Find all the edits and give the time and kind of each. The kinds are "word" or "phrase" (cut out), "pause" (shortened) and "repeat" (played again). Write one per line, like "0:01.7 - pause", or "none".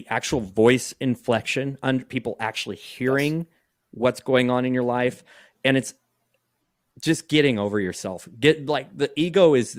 none